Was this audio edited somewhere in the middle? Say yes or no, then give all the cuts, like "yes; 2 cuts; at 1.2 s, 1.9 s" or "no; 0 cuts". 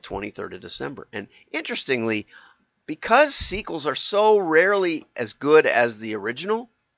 no; 0 cuts